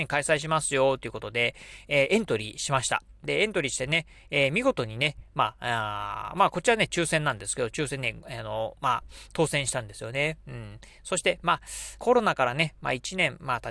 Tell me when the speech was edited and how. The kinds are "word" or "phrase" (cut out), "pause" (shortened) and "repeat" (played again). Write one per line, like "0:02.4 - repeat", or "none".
0:12.0 - word